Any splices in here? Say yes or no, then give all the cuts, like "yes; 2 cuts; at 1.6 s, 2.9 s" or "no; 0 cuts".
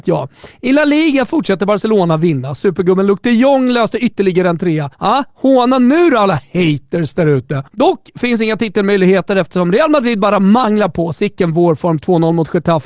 yes; 2 cuts; at 4.9 s, 7.7 s